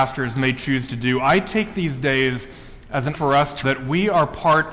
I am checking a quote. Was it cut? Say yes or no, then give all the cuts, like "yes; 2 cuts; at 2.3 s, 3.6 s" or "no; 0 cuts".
yes; 2 cuts; at 3.1 s, 3.6 s